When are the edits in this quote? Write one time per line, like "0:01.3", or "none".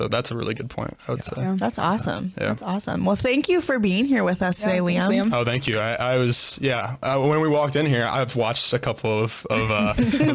none